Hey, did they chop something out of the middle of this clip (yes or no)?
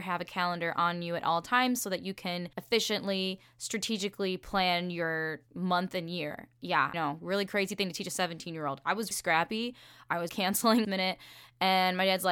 yes